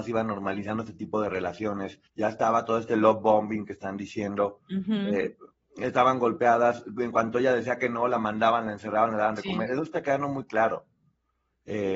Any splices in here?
yes; 2 cuts; at 2.1 s, 5.5 s

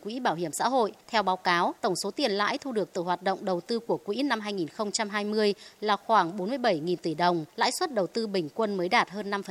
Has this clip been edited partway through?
yes; 3 cuts; at 1.0 s, 1.8 s, 7.5 s

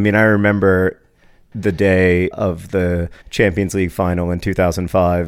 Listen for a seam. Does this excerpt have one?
yes; 2 cuts; at 2.3 s, 3.2 s

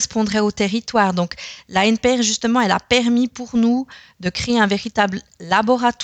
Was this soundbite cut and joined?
no; 0 cuts

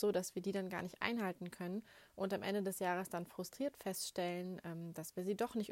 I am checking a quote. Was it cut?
no; 0 cuts

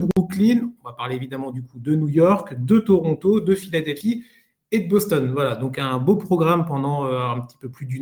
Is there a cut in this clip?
no; 0 cuts

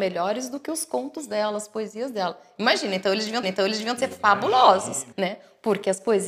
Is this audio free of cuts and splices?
no; 2 cuts; at 3.4 s, 5.1 s

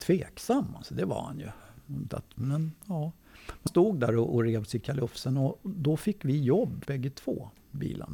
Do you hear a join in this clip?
yes; 3 cuts; at 2.1 s, 3.7 s, 6.8 s

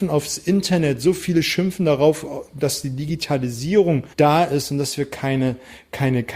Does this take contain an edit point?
yes; 1 cut; at 4.1 s

